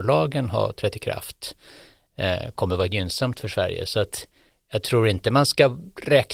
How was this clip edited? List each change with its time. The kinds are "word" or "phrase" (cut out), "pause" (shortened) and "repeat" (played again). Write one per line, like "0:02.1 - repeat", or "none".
none